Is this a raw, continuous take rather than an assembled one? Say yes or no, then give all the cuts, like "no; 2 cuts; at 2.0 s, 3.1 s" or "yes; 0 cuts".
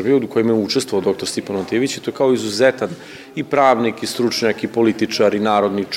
yes; 0 cuts